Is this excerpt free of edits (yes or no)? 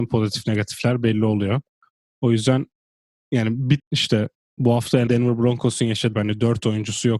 no